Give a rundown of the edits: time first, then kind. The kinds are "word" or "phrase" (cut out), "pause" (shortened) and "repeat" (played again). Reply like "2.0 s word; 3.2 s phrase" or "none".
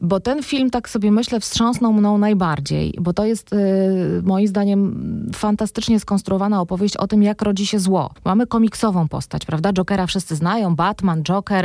8.2 s pause